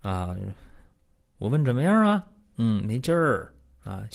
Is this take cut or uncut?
uncut